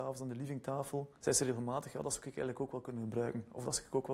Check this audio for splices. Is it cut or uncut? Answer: cut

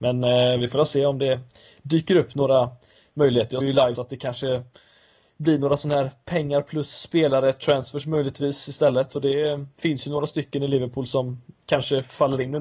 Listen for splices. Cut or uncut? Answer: cut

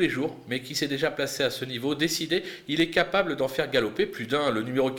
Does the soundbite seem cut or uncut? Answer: uncut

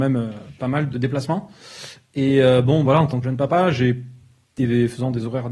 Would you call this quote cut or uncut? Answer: cut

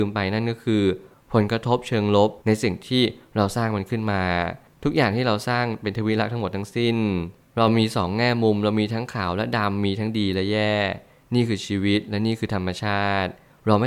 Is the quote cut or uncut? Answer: cut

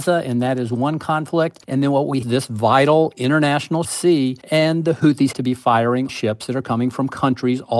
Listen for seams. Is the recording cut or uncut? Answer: cut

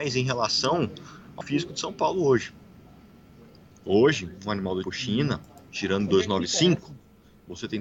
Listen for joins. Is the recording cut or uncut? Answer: cut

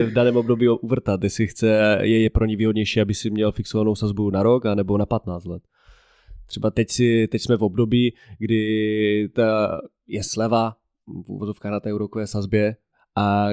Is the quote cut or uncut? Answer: uncut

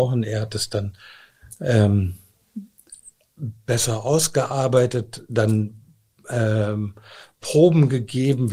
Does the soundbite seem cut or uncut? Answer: uncut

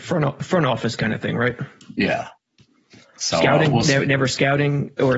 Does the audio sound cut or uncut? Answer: uncut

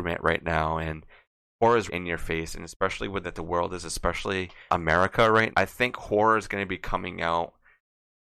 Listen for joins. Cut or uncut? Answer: cut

